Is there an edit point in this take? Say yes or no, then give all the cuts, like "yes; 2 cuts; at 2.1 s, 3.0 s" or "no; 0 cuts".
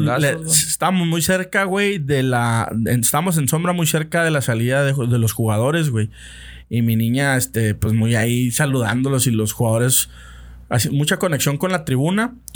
no; 0 cuts